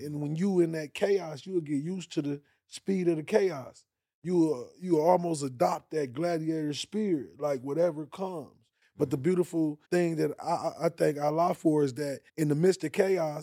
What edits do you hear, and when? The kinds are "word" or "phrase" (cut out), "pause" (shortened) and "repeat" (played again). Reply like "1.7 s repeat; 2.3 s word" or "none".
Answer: 9.8 s pause; 12.3 s pause